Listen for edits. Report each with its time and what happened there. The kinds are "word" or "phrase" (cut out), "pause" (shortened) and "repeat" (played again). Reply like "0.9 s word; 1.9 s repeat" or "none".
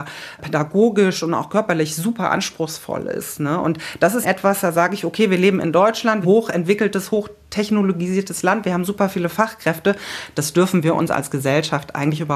4.2 s word; 6.2 s phrase